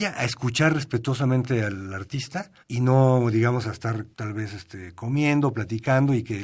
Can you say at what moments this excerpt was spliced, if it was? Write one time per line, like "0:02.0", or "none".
0:02.6
0:04.1

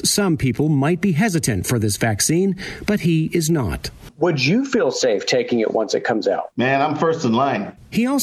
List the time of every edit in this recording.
0:06.5

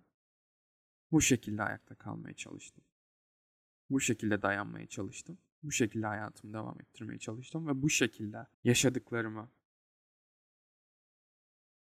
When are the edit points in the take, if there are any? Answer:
0:08.5

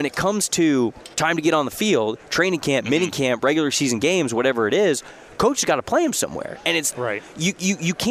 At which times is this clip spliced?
0:01.1
0:06.9

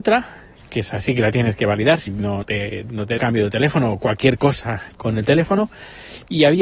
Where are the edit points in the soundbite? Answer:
0:02.1
0:02.4
0:03.2

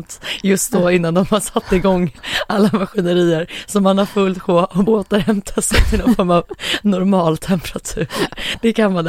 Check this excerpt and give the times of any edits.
0:04.8

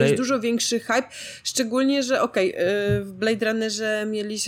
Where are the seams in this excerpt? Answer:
none

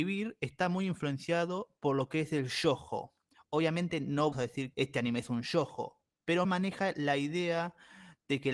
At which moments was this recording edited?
0:04.3
0:04.7
0:06.4

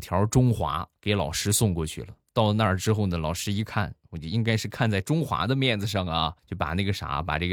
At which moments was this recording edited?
0:01.0
0:06.4

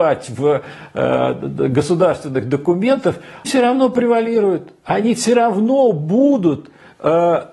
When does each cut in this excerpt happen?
0:03.4

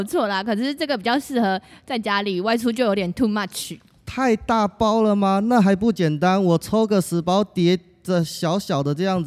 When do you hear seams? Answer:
none

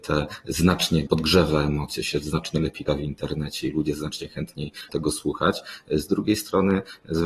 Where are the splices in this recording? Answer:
0:01.1
0:02.9
0:04.9

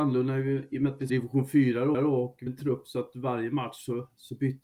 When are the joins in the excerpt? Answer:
0:01.1
0:01.9
0:02.5

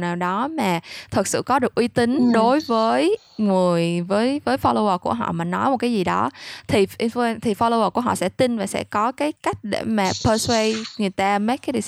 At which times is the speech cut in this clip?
0:03.3
0:09.4

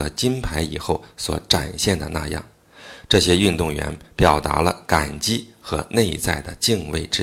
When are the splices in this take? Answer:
none

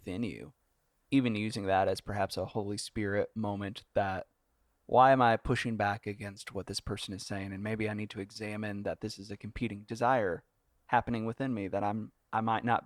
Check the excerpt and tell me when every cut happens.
none

